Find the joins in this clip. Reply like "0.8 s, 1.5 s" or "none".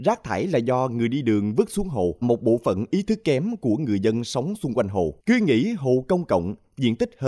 2.2 s, 5.2 s